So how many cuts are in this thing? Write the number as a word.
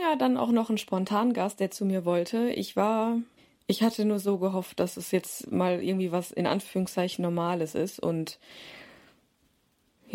one